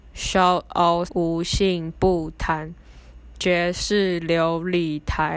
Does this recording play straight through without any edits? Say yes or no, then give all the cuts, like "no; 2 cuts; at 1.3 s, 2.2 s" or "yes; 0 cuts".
no; 1 cut; at 1.1 s